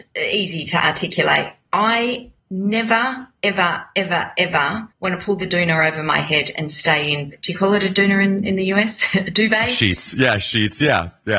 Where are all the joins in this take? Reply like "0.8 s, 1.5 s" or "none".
2.4 s, 4.9 s

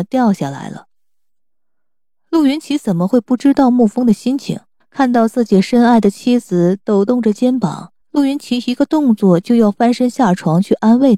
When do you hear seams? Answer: 4.8 s, 8.0 s

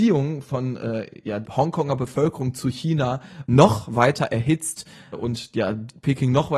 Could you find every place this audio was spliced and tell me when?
1.4 s, 3.5 s, 5.1 s

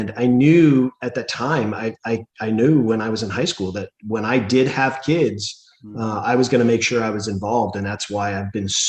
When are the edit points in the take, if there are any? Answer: 2.3 s

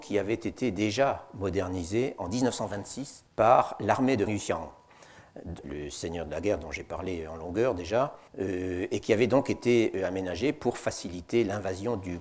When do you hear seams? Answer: 3.3 s, 4.3 s, 5.6 s, 8.3 s

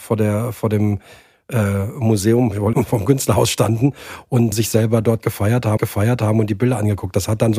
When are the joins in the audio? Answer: 2.7 s, 4.5 s, 5.8 s

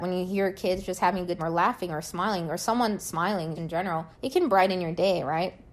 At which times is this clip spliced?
1.4 s, 3.6 s, 4.1 s

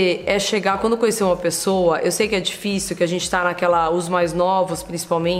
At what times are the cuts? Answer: none

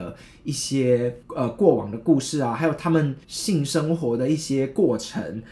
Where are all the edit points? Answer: 1.2 s, 3.2 s

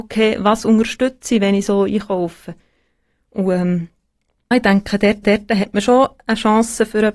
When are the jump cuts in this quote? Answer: 4.5 s, 5.2 s

